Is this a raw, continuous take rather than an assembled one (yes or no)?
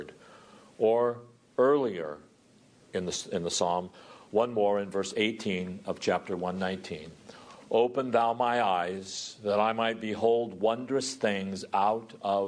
yes